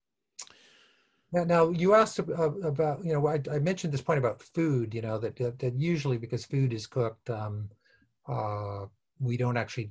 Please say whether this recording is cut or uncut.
uncut